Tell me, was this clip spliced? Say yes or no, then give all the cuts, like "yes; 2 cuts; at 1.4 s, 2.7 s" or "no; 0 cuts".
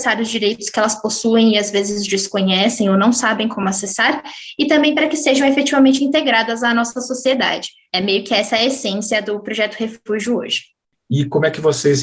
no; 0 cuts